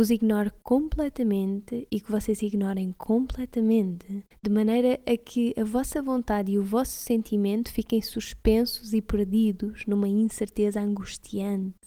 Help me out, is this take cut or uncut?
cut